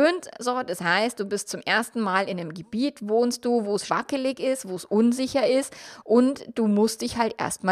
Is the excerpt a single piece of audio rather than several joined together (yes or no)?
no